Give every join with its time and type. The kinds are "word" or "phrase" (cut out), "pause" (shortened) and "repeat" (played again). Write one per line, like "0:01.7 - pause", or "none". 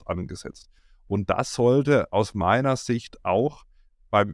none